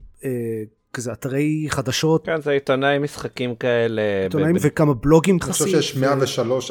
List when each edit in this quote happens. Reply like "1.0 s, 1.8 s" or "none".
4.6 s, 5.4 s